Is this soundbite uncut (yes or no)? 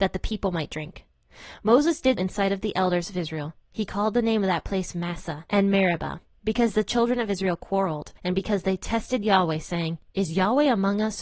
no